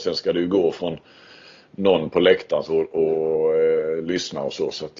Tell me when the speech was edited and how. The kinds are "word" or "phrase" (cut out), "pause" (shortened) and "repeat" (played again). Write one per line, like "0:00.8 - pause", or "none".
0:02.6 - phrase